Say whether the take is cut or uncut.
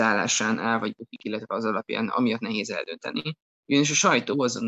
uncut